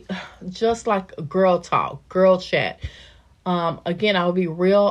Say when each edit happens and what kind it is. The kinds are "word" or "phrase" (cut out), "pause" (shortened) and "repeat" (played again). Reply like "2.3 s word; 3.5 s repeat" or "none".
none